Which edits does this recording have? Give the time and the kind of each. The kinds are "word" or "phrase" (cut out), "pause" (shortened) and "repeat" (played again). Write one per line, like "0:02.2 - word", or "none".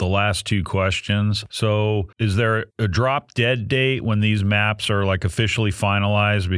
0:02.1 - pause
0:02.7 - pause